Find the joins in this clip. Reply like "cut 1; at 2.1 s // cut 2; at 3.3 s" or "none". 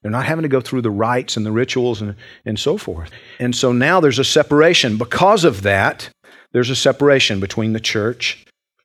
none